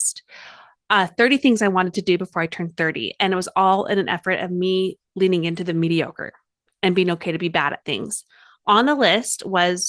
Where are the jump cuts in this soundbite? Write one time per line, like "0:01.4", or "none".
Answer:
none